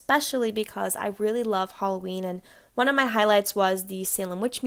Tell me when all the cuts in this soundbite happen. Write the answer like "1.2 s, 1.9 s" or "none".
none